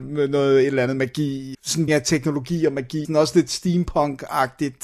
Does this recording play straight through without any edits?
no; 3 cuts; at 1.5 s, 1.9 s, 3.0 s

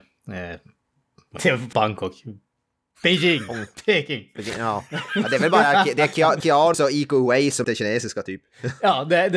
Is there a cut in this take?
yes; 5 cuts; at 1.4 s, 1.7 s, 6.4 s, 6.7 s, 7.6 s

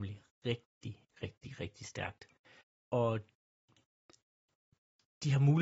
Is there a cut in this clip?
yes; 1 cut; at 2.6 s

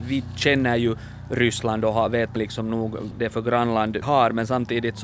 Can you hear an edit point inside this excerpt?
yes; 3 cuts; at 2.4 s, 3.2 s, 4.0 s

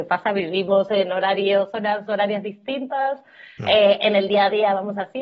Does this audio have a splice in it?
no; 0 cuts

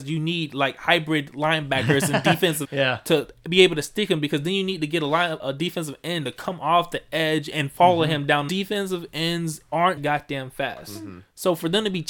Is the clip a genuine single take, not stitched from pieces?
no; 4 cuts; at 2.6 s, 5.4 s, 8.5 s, 10.0 s

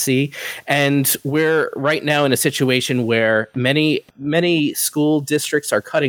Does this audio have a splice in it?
yes; 1 cut; at 4.1 s

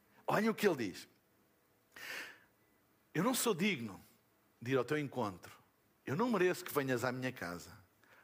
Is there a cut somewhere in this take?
no; 0 cuts

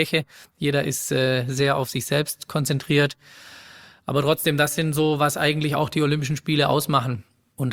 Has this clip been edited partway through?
no; 0 cuts

